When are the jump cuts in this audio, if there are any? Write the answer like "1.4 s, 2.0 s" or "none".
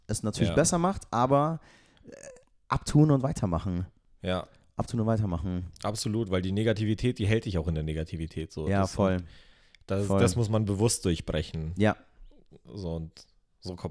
none